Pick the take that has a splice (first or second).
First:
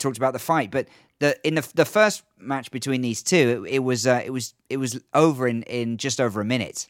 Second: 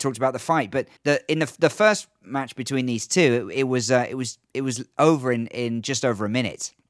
second